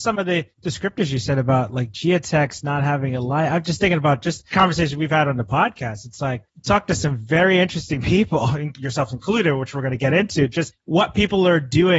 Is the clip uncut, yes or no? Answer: yes